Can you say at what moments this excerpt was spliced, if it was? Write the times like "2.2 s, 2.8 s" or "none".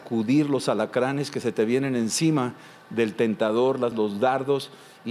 3.9 s